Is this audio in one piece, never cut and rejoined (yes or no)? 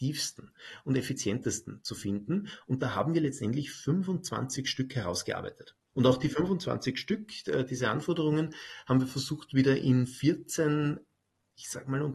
no